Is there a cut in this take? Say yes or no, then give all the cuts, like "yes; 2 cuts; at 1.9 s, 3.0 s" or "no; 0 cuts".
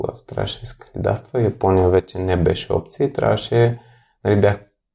no; 0 cuts